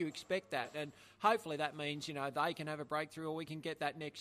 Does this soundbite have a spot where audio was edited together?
no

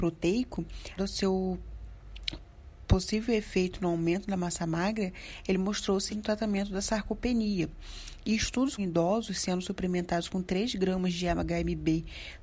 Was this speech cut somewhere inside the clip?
yes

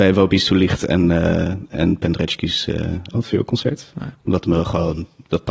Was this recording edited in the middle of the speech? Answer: yes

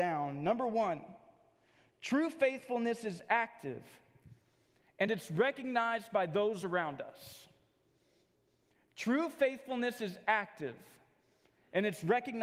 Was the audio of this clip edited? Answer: no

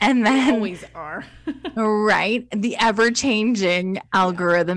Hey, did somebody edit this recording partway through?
no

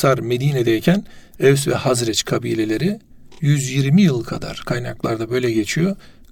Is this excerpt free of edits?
yes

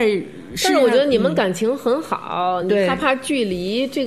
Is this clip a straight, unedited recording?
yes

